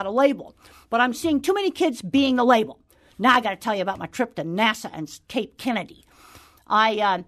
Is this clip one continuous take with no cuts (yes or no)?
yes